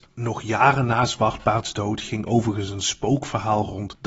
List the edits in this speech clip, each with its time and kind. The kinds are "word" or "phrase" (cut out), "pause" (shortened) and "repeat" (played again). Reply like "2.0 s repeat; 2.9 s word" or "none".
none